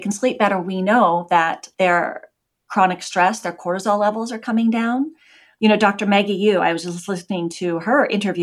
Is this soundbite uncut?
yes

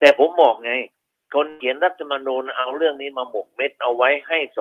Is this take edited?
no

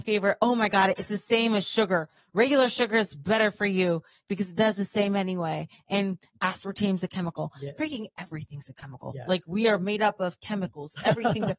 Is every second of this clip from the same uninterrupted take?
yes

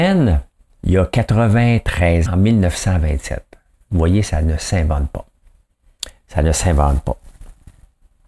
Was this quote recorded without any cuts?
no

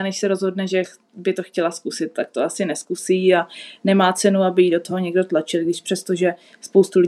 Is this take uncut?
yes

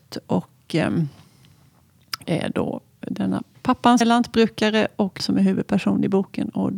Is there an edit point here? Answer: yes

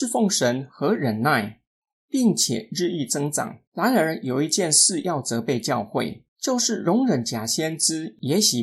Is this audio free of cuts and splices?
no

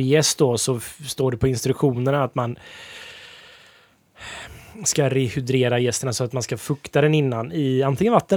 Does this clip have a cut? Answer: no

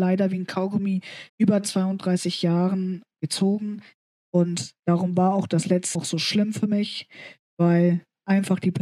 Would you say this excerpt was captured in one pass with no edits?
no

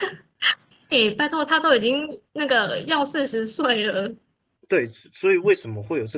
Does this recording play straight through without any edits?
yes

